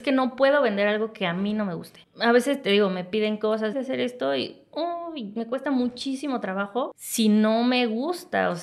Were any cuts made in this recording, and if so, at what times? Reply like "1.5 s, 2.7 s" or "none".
3.7 s